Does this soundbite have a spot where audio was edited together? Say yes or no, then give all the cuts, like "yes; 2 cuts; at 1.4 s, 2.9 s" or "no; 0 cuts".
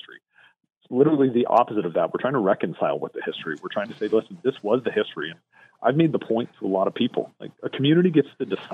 no; 0 cuts